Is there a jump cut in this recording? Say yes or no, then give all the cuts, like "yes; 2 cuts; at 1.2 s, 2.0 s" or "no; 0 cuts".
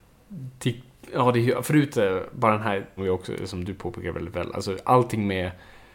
yes; 2 cuts; at 1.9 s, 3.0 s